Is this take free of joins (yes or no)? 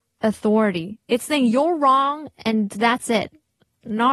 yes